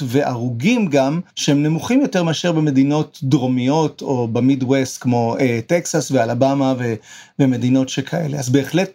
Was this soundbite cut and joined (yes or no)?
yes